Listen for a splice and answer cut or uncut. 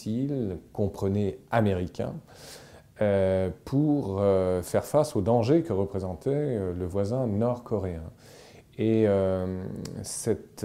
uncut